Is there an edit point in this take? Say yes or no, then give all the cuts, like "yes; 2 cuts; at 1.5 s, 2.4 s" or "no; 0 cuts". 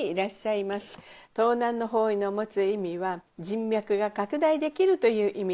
yes; 1 cut; at 3.3 s